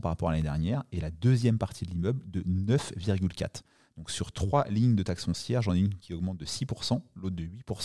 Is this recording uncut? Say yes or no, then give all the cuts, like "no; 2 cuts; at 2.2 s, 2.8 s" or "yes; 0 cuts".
yes; 0 cuts